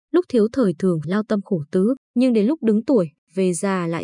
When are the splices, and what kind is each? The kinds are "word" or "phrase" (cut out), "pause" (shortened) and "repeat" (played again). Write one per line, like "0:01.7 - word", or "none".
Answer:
0:01.0 - word
0:02.0 - pause